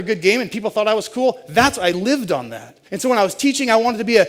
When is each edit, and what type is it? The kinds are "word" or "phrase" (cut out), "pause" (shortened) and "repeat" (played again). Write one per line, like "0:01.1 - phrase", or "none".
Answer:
0:02.9 - pause